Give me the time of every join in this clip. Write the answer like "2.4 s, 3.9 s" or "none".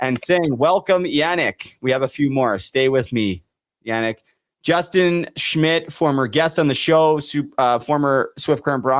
none